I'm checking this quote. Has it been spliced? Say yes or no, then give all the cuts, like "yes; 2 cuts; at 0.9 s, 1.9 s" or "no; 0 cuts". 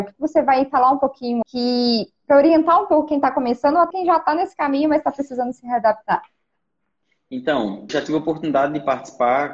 yes; 3 cuts; at 1.4 s, 3.9 s, 7.9 s